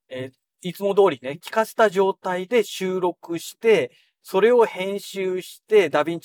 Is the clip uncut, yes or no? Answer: yes